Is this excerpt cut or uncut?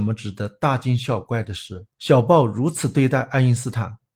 cut